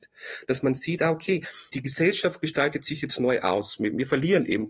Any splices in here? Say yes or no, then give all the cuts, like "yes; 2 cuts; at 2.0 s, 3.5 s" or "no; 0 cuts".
no; 0 cuts